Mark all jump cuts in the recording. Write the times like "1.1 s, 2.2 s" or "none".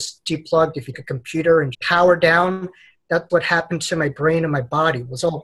0.9 s, 1.7 s, 3.3 s